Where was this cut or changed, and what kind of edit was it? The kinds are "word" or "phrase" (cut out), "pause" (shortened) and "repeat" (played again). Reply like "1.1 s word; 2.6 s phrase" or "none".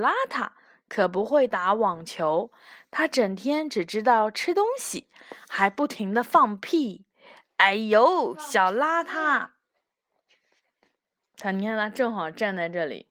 none